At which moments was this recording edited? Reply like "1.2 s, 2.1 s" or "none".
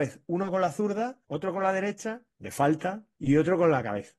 1.2 s, 2.3 s, 3.1 s